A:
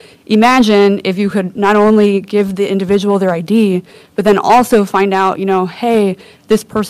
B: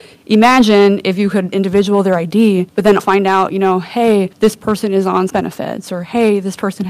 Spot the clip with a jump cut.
B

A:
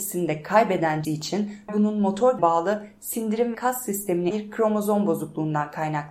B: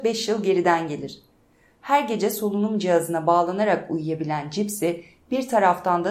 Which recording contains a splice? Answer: A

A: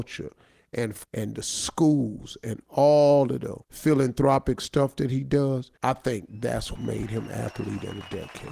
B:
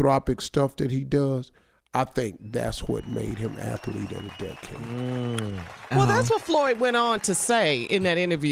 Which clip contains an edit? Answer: A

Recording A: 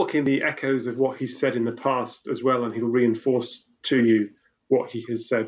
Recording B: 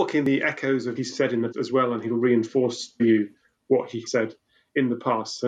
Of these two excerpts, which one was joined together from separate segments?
B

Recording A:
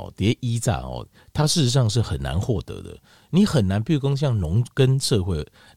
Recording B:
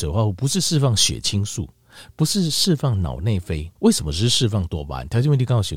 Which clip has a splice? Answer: B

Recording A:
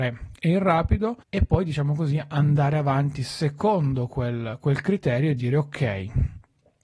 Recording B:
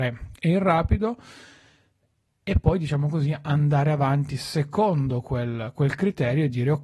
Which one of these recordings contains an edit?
A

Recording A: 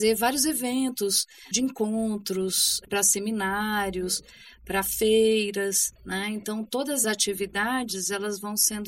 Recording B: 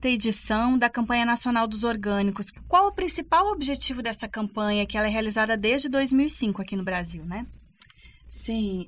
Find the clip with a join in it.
A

